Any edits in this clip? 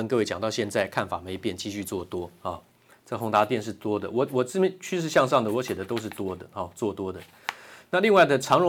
no; 0 cuts

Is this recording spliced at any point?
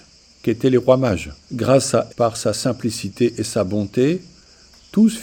yes; 2 cuts; at 1.4 s, 2.1 s

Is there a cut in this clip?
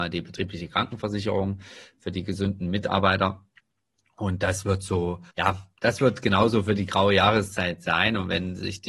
yes; 1 cut; at 5.3 s

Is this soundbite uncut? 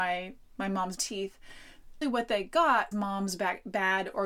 no; 3 cuts; at 1.0 s, 2.0 s, 2.9 s

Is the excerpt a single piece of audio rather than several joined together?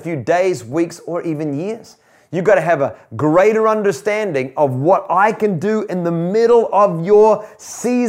yes; 0 cuts

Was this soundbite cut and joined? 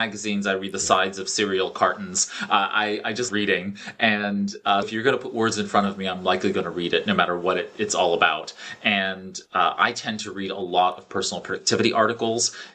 yes; 2 cuts; at 3.3 s, 4.8 s

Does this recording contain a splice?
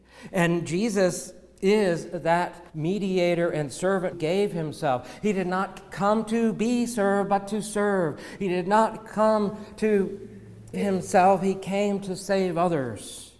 yes; 3 cuts; at 2.7 s, 4.1 s, 10.7 s

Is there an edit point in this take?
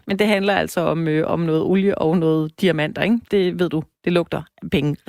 no; 0 cuts

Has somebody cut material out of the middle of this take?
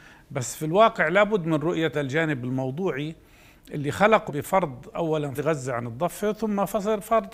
yes; 3 cuts; at 1.9 s, 4.3 s, 5.4 s

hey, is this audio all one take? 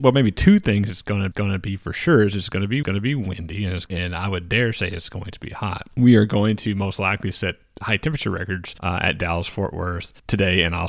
no; 4 cuts; at 1.3 s, 2.8 s, 3.9 s, 7.8 s

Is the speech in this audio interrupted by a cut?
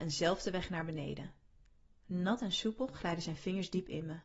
no; 0 cuts

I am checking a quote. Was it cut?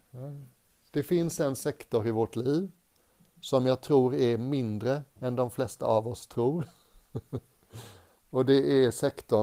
no; 0 cuts

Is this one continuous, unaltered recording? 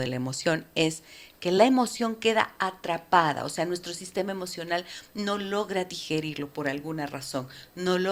yes; 0 cuts

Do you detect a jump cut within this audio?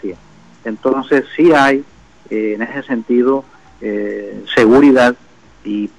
no; 0 cuts

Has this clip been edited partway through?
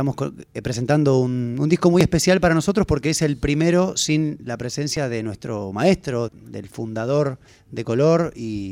yes; 2 cuts; at 6.3 s, 7.5 s

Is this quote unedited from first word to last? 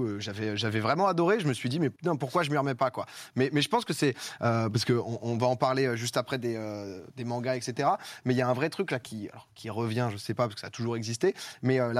no; 2 cuts; at 2.0 s, 7.1 s

